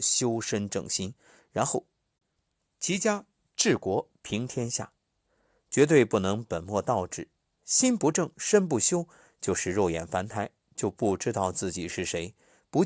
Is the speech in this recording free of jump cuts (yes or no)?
yes